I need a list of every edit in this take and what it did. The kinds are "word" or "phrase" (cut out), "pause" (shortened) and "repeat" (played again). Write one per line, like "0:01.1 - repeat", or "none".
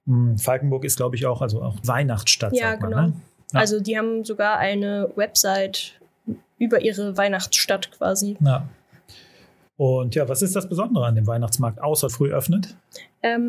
0:01.8 - word
0:12.1 - phrase